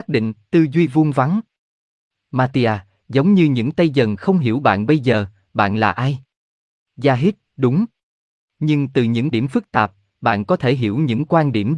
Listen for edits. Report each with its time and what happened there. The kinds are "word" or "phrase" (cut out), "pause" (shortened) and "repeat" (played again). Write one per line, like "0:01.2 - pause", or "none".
0:09.3 - word